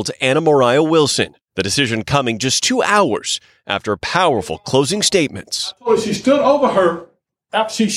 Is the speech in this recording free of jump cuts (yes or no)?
yes